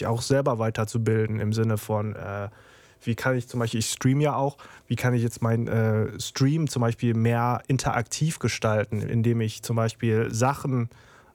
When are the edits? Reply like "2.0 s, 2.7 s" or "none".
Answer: none